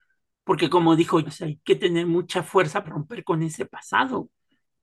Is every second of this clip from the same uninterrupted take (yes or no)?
no